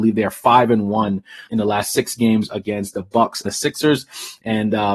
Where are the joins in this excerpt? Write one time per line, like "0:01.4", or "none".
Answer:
0:01.5
0:03.5